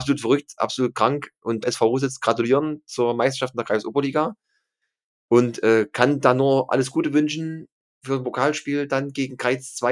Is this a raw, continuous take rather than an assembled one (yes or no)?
no